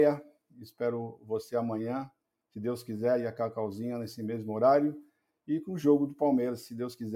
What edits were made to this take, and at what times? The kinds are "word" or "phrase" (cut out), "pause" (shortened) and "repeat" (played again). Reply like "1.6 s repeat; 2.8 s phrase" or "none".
none

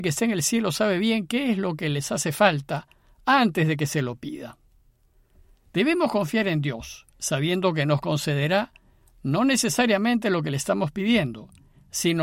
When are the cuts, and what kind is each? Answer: 7.1 s pause

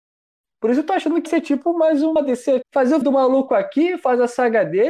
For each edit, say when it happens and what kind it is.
1.3 s word; 2.6 s word; 3.0 s word

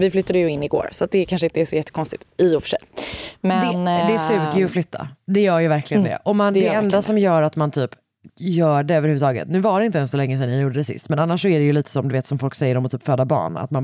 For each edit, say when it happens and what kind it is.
8.3 s pause

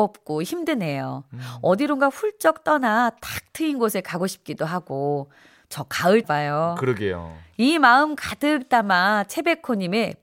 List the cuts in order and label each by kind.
6.2 s word

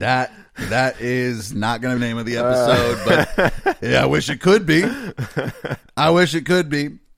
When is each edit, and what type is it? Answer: 2.0 s phrase

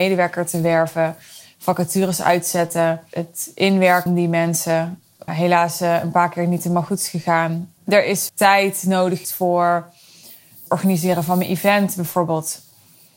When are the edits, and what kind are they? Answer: 4.1 s word; 5.3 s phrase; 7.8 s pause; 8.3 s word; 9.2 s word

